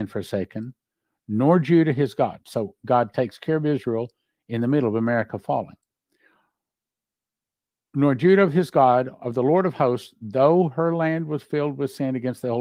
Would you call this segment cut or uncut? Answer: uncut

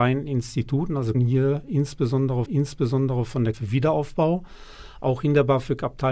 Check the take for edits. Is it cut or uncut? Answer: cut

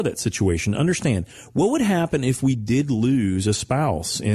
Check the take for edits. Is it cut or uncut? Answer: uncut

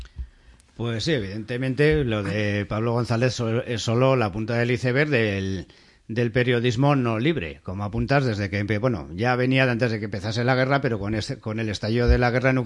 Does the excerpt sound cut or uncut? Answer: uncut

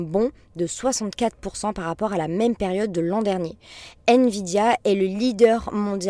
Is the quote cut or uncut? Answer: uncut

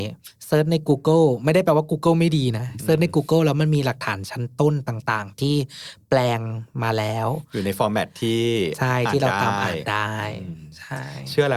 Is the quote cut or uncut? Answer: uncut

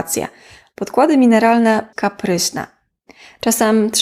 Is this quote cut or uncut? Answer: cut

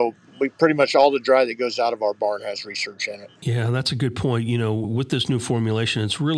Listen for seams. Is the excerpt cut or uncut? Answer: cut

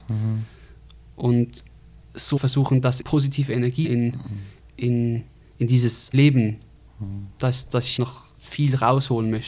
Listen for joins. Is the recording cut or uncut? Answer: cut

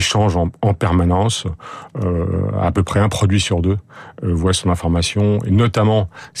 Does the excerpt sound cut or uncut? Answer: uncut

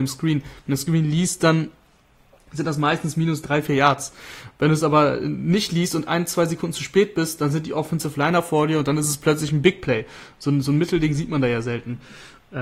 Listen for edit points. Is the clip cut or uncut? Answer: uncut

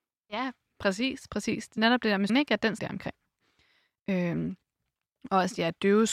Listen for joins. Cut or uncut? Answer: cut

